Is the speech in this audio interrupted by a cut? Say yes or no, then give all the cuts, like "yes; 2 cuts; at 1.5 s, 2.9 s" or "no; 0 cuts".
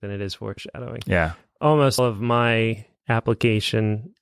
yes; 1 cut; at 2.0 s